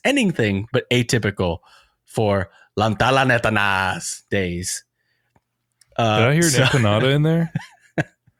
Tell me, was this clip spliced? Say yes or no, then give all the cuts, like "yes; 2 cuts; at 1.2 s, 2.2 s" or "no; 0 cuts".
no; 0 cuts